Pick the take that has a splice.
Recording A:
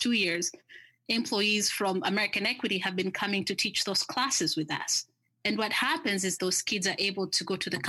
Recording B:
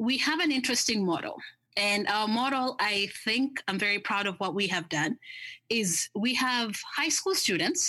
A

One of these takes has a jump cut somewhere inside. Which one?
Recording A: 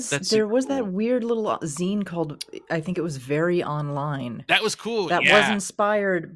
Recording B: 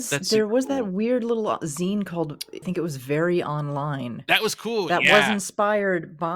B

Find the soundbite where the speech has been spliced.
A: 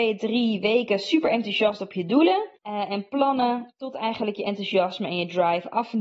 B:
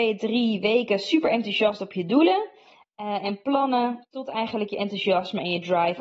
A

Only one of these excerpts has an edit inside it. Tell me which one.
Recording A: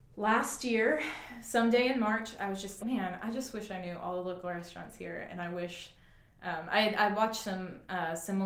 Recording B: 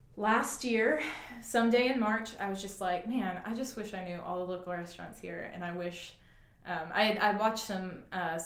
A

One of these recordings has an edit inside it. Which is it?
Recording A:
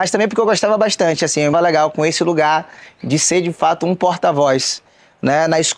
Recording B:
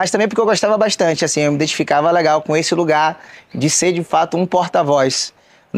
A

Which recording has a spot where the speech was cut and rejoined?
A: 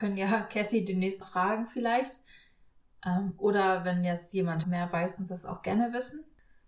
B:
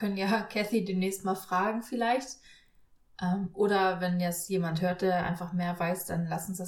A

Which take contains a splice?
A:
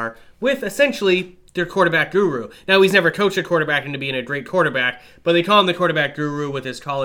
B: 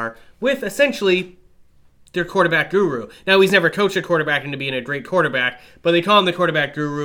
A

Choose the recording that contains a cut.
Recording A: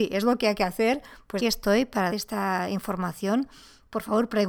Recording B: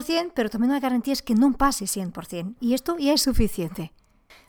A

